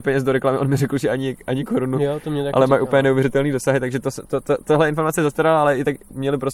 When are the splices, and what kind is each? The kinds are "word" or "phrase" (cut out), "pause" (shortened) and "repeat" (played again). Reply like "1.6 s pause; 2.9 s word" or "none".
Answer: none